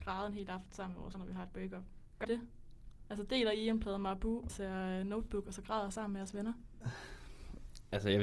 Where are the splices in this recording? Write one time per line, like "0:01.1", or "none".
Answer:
0:01.1
0:02.2
0:04.5